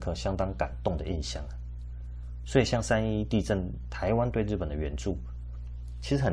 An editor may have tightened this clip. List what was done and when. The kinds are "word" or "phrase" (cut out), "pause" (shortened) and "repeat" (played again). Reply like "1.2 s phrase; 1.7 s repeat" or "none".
none